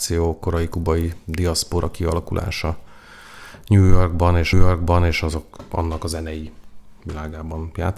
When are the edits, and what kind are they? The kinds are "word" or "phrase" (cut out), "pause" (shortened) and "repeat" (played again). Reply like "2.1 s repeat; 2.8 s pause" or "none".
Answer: 4.5 s repeat